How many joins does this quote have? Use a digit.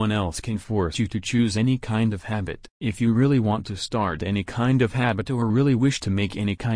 1